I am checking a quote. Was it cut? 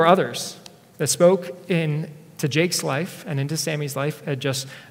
no; 0 cuts

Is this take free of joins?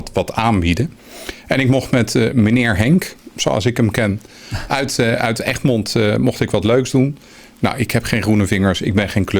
yes; 0 cuts

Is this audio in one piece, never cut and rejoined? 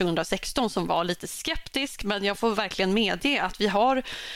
yes; 0 cuts

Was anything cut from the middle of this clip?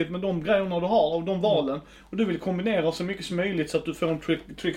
no; 0 cuts

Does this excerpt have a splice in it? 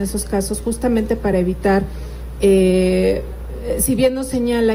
no; 0 cuts

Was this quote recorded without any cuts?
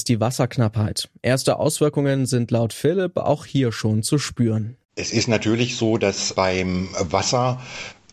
no; 1 cut; at 4.8 s

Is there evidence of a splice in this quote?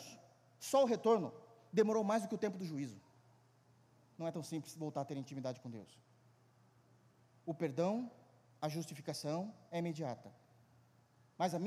no; 0 cuts

